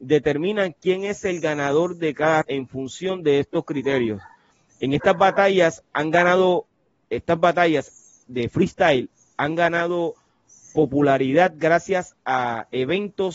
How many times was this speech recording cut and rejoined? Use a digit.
1